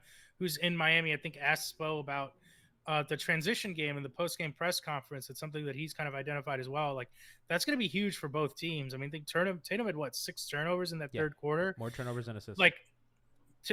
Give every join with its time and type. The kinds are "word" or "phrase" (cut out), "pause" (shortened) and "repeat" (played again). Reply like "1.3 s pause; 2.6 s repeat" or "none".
none